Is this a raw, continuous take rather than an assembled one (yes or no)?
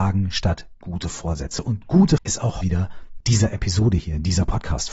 no